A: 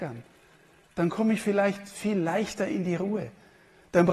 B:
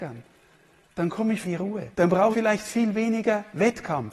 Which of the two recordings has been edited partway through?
B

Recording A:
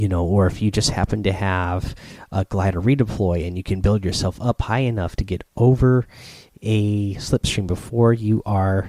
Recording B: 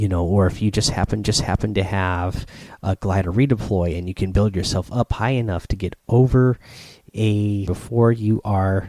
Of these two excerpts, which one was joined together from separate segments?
B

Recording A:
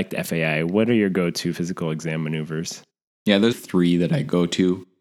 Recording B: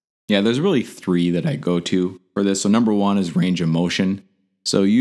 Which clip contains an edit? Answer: A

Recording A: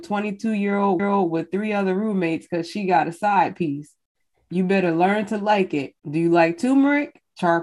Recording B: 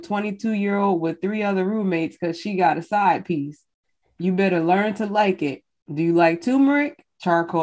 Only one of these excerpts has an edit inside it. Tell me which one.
A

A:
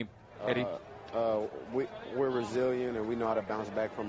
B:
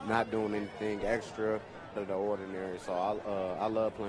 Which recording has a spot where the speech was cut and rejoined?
B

